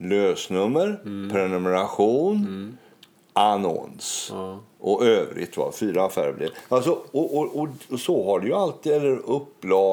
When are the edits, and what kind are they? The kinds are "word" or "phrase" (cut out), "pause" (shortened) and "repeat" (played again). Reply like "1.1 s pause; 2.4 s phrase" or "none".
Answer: none